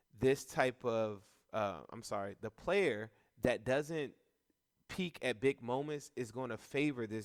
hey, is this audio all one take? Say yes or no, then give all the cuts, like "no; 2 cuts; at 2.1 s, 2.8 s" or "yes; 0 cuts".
yes; 0 cuts